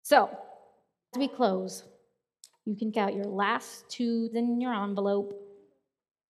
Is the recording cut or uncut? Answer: cut